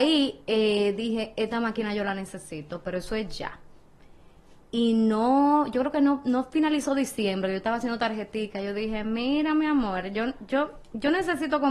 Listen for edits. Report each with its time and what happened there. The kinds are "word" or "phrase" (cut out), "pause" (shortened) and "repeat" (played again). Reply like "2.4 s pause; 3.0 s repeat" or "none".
none